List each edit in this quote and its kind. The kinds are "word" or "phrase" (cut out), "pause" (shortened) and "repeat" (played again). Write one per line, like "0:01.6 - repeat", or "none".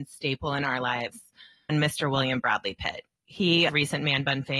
0:01.7 - word
0:03.7 - word